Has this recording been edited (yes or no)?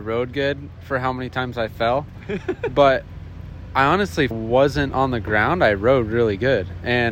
yes